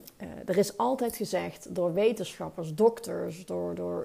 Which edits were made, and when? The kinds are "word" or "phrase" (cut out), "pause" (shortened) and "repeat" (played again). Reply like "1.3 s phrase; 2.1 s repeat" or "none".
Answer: none